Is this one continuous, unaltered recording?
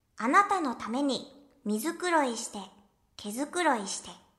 yes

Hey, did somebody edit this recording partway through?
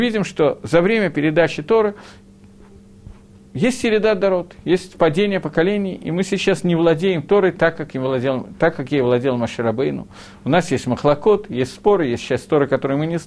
no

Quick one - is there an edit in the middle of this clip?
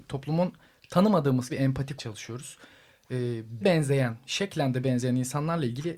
yes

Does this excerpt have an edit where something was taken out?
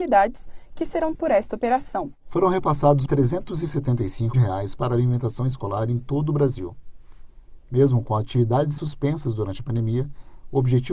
yes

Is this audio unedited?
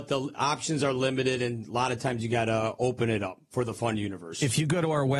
yes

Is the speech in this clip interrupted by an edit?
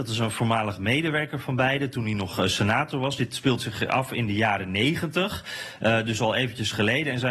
no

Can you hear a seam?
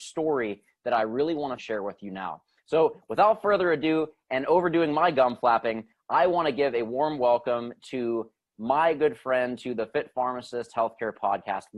yes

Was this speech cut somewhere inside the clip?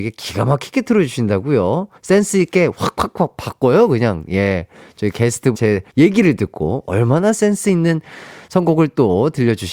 yes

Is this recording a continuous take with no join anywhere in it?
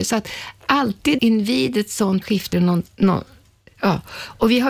no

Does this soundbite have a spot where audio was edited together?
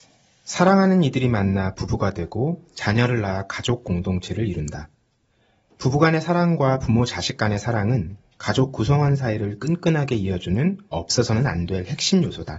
no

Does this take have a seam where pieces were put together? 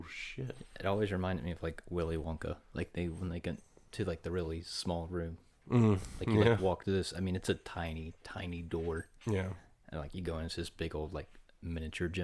no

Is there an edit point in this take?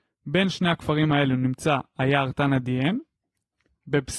no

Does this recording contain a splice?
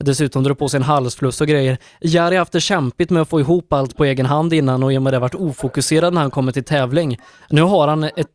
no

